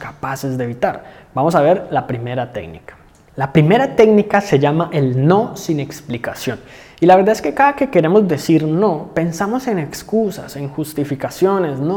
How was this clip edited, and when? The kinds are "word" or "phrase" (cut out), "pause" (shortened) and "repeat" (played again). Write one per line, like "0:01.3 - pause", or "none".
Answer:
none